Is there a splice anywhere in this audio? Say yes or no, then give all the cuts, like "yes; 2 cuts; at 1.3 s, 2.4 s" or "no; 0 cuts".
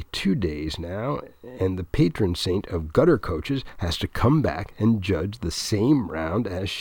no; 0 cuts